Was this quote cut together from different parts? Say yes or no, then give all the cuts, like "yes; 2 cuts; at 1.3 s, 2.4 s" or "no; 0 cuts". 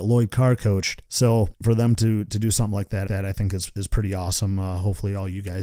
yes; 1 cut; at 3.1 s